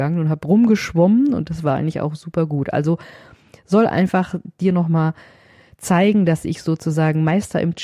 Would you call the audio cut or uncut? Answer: uncut